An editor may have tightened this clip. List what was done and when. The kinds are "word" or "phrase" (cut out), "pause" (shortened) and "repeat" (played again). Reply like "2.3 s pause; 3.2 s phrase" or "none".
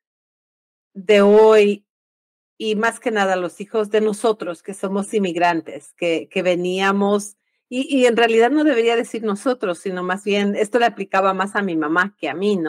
none